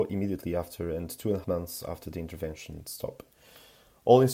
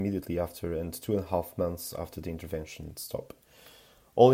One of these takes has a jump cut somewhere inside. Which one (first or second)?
first